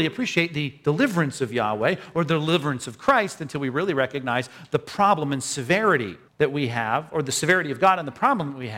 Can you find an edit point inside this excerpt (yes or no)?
yes